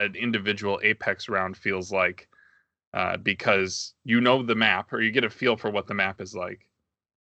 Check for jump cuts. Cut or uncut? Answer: uncut